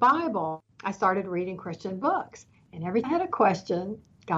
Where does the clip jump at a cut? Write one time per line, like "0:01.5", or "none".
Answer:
0:03.0